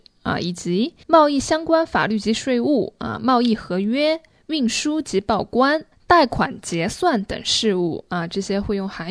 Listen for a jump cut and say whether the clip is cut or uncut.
cut